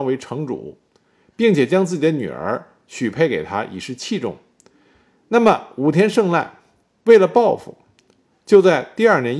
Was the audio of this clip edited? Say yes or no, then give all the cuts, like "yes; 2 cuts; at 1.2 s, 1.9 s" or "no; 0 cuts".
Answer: no; 0 cuts